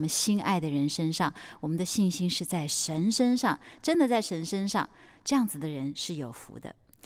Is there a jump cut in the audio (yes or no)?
no